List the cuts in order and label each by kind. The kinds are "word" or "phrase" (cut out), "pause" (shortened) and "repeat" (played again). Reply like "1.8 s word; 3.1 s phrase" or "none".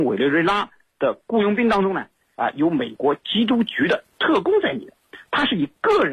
none